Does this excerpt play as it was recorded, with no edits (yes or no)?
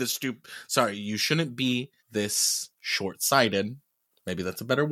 no